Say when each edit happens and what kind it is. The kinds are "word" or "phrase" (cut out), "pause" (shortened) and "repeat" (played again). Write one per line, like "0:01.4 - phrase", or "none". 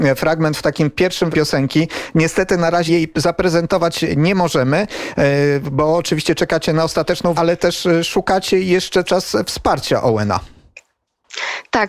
0:01.3 - phrase
0:02.9 - word
0:07.3 - word
0:09.1 - word